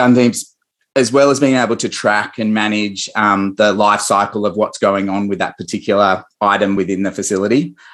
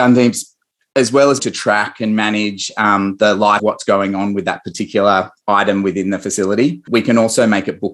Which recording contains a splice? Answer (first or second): second